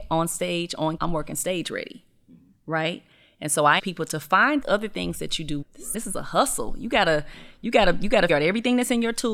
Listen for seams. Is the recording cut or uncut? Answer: cut